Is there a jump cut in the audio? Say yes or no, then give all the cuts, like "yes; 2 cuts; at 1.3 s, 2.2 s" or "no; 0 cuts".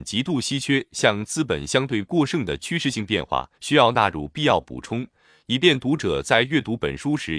yes; 1 cut; at 3.6 s